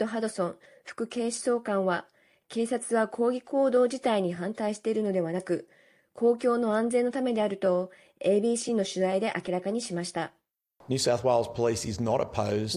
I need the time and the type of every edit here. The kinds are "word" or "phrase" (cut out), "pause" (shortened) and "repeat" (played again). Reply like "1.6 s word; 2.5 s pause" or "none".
none